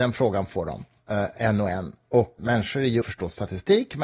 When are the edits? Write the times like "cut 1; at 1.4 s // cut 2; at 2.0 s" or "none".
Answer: cut 1; at 0.9 s // cut 2; at 2.4 s // cut 3; at 3.0 s